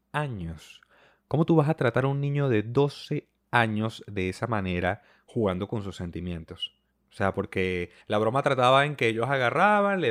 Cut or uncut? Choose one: cut